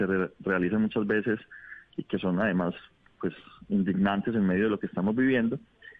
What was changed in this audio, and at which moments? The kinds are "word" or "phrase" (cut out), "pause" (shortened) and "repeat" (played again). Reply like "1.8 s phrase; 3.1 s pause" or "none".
none